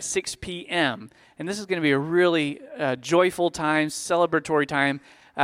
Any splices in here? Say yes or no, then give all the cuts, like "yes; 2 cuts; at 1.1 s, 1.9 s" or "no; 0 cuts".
no; 0 cuts